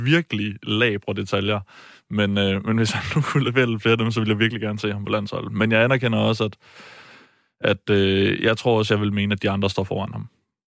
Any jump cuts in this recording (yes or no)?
no